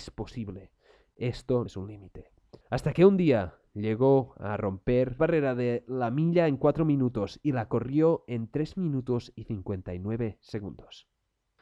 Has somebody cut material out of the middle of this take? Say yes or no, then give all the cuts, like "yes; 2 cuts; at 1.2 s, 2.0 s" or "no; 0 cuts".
yes; 3 cuts; at 1.7 s, 2.6 s, 5.2 s